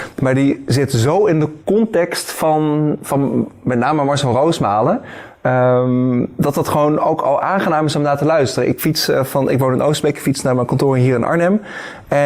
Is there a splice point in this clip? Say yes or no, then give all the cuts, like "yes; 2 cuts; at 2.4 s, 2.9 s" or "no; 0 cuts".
yes; 1 cut; at 1.6 s